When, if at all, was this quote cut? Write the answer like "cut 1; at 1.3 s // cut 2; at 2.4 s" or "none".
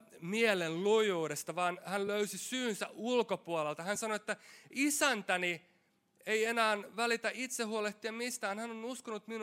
none

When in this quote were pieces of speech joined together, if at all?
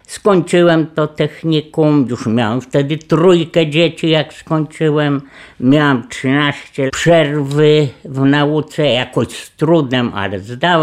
cut 1; at 6.9 s

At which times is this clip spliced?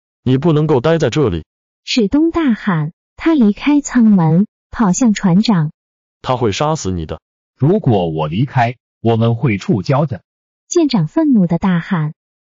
none

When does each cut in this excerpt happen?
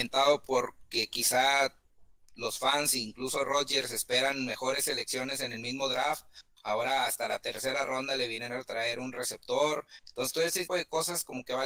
cut 1; at 10.7 s

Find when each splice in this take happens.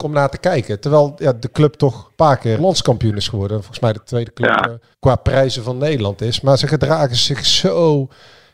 cut 1; at 2.2 s // cut 2; at 2.6 s // cut 3; at 4.9 s

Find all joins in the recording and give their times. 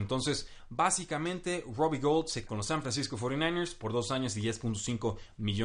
cut 1; at 2.5 s

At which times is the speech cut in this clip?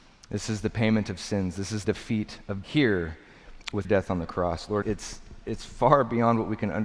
cut 1; at 1.8 s // cut 2; at 2.6 s // cut 3; at 3.8 s // cut 4; at 4.8 s

